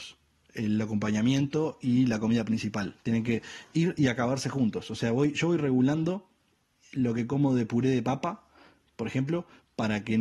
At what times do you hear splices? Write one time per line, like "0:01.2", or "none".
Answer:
none